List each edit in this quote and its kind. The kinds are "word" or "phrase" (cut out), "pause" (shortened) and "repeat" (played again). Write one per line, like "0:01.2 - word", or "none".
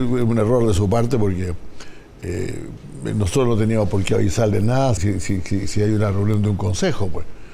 0:05.0 - word